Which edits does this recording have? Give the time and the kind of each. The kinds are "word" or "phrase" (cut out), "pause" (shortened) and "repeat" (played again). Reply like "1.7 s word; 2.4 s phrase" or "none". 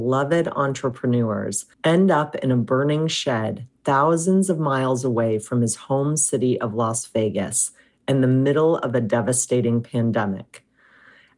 1.7 s pause

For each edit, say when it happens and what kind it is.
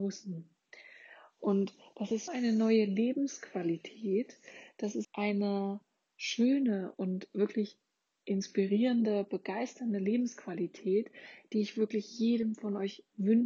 2.3 s word; 5.0 s word

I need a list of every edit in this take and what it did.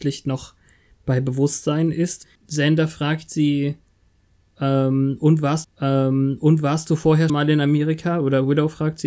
2.4 s pause; 5.6 s repeat; 7.3 s word

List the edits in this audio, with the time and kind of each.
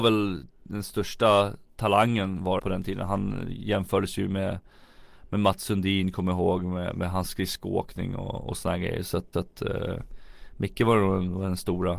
2.6 s phrase; 9.3 s repeat

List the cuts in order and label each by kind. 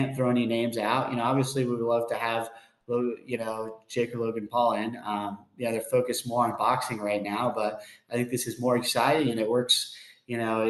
none

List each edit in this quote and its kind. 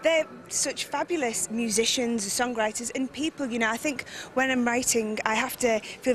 none

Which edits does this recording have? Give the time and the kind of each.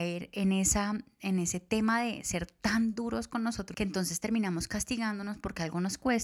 3.7 s word

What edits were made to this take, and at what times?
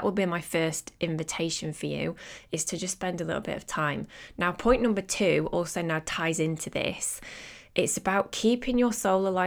none

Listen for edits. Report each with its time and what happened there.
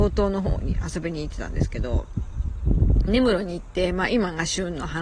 3.1 s word

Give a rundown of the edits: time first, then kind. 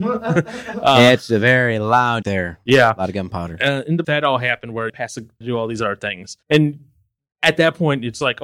2.2 s phrase; 4.0 s phrase; 4.9 s phrase; 5.4 s phrase; 6.4 s pause

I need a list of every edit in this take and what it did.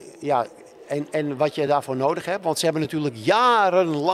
none

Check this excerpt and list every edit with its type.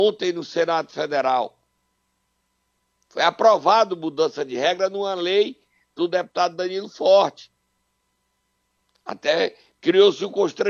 none

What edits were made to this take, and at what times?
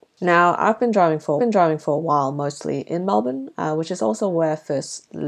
1.4 s repeat

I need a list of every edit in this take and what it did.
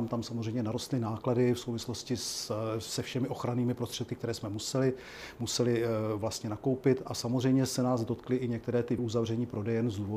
9.0 s word

